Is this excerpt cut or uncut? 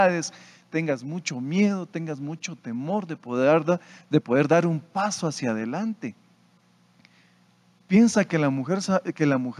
uncut